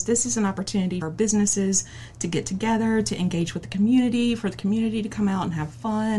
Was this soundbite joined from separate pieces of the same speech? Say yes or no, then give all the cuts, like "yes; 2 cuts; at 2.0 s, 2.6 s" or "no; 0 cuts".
yes; 1 cut; at 1.0 s